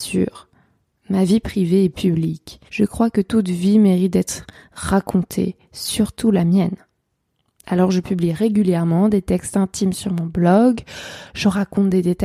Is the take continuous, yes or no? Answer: no